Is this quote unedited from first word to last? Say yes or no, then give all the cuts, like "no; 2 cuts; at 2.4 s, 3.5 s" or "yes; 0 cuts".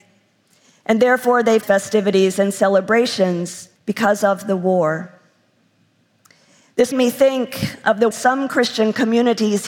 no; 4 cuts; at 1.6 s, 3.8 s, 6.9 s, 8.1 s